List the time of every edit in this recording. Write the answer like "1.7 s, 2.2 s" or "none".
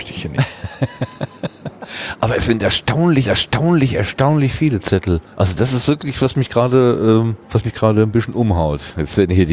3.2 s, 5.3 s, 7.4 s